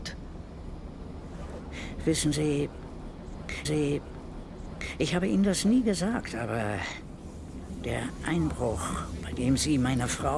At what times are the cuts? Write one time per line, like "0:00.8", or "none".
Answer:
0:03.6